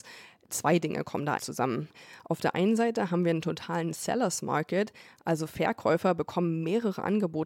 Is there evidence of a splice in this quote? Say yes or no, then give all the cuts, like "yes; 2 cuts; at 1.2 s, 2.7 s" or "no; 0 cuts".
yes; 1 cut; at 1.4 s